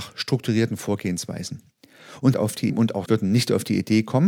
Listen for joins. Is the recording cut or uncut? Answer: cut